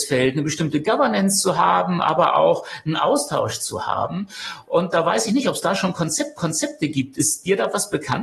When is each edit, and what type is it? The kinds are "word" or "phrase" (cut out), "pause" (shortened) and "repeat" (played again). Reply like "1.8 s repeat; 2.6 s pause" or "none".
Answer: 6.4 s repeat